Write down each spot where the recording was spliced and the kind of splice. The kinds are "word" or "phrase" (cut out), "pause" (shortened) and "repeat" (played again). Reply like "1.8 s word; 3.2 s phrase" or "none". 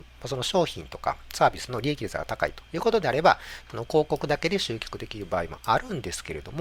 2.7 s pause